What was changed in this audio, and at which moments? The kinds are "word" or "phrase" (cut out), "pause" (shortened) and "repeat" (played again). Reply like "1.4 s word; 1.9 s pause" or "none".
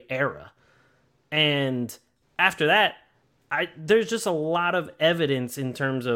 none